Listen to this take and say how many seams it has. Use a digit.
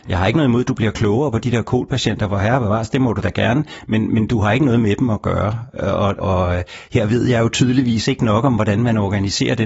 1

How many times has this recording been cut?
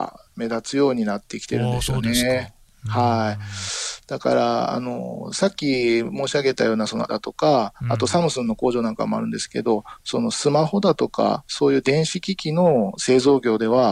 1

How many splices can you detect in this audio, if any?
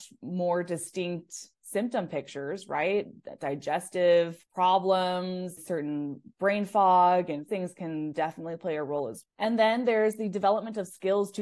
4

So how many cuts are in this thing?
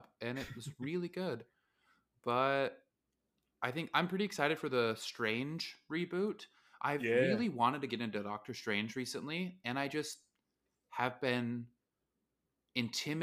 0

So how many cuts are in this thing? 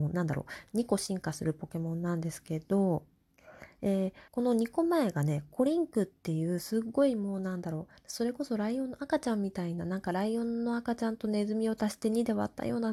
1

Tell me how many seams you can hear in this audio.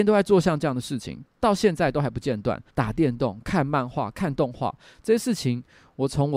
1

